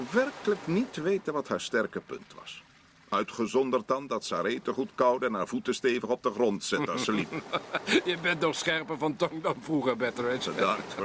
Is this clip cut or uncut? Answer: uncut